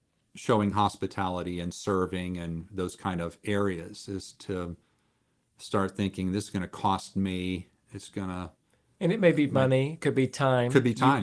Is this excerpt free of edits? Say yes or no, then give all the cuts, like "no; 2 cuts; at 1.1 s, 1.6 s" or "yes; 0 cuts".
yes; 0 cuts